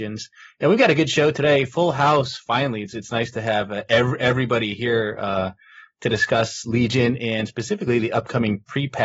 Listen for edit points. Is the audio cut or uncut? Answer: uncut